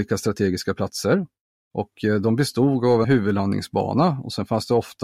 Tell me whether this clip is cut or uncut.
cut